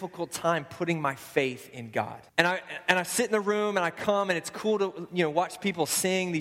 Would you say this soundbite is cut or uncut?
cut